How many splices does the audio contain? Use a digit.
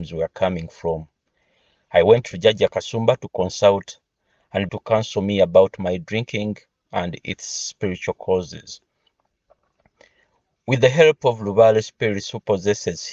1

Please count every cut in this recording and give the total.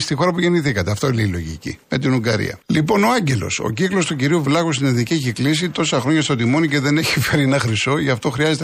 2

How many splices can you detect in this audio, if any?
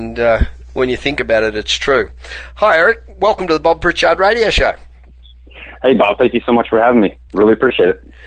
0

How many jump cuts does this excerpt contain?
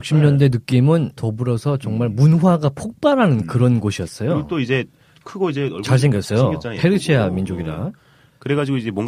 2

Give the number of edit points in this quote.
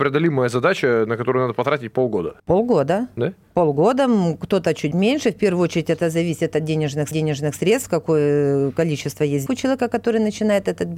4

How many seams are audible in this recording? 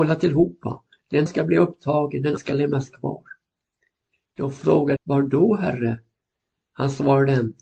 3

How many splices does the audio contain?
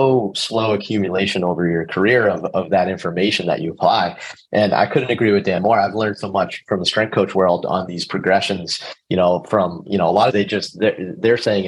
1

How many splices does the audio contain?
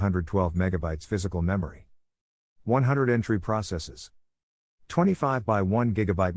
0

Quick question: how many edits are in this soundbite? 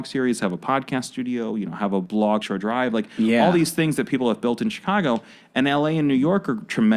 1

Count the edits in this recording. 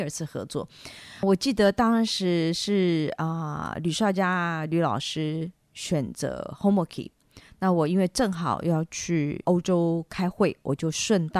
1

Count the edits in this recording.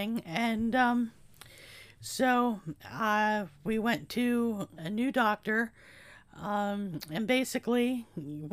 2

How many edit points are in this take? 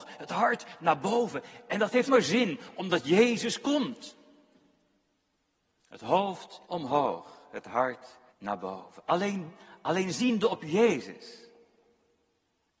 3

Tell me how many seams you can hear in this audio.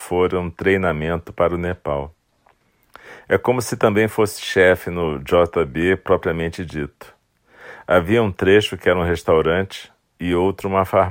0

